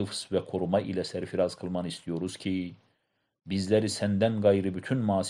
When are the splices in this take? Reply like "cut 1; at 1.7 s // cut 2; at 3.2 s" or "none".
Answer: none